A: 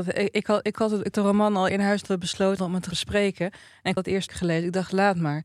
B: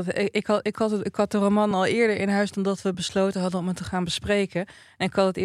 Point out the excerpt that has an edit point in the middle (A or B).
A